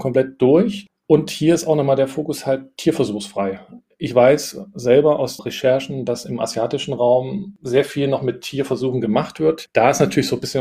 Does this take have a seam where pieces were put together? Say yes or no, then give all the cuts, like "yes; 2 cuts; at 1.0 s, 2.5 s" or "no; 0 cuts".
yes; 1 cut; at 5.4 s